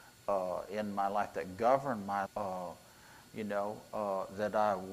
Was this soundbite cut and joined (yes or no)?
yes